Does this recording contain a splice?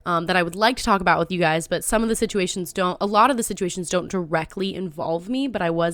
no; 0 cuts

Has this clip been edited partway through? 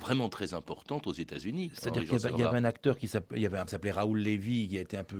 yes; 1 cut; at 3.7 s

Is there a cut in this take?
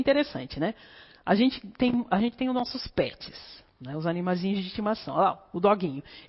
no; 0 cuts

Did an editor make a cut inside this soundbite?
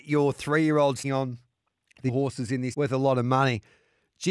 yes; 3 cuts; at 1.0 s, 2.1 s, 2.7 s

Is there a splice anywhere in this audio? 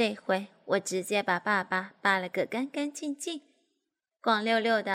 no; 0 cuts

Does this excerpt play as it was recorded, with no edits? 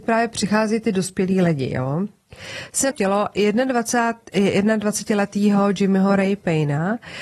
no; 1 cut; at 2.9 s

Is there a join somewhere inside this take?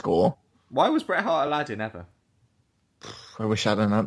no; 0 cuts

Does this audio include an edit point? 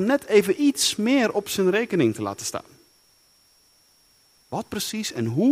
no; 0 cuts

